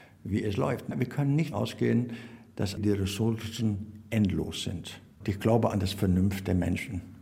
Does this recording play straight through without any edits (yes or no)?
no